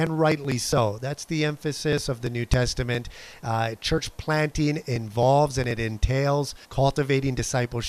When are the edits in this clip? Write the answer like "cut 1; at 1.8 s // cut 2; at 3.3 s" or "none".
cut 1; at 3.8 s // cut 2; at 6.6 s